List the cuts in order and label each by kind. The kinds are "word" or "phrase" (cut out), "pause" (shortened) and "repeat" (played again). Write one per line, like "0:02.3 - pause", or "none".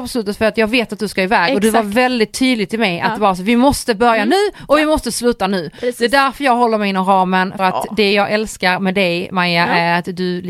0:07.6 - word